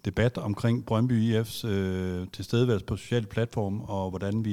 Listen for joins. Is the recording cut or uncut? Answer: uncut